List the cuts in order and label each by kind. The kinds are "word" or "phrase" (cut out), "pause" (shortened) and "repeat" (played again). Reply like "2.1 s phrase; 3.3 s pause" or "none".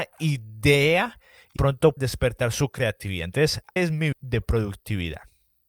1.6 s word; 2.0 s word; 3.8 s word; 4.1 s word

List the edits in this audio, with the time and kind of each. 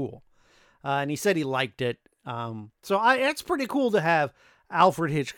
2.8 s pause

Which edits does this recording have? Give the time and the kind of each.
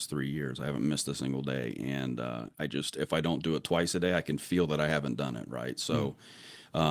2.5 s pause

